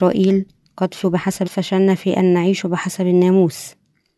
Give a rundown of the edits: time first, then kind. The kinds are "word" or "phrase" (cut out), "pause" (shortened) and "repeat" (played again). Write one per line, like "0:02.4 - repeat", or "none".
0:01.0 - word
0:01.4 - phrase